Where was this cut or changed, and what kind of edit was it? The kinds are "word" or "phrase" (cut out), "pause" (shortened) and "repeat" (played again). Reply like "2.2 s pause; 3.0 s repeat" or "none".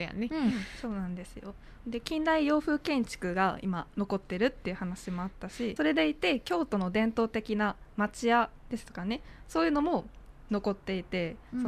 5.8 s phrase